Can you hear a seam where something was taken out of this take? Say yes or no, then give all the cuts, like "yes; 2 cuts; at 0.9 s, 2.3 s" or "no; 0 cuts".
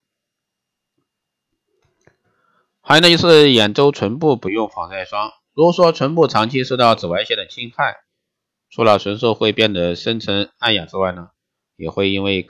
no; 0 cuts